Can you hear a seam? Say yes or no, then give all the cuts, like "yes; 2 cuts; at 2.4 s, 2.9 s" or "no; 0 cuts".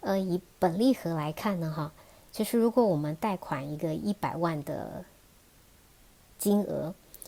no; 0 cuts